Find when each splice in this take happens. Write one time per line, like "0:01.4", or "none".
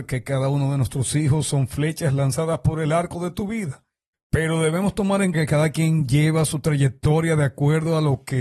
0:04.1
0:05.3